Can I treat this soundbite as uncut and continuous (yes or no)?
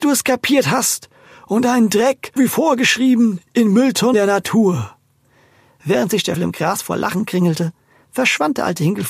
no